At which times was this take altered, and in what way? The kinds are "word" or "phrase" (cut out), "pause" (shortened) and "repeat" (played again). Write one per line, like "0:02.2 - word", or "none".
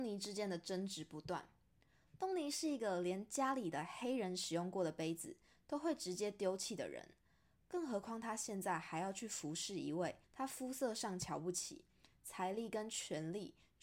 0:10.2 - pause